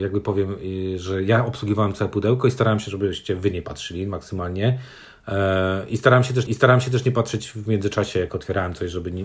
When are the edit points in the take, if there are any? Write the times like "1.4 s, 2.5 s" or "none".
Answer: 6.5 s